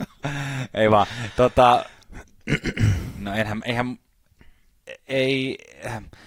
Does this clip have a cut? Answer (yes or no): yes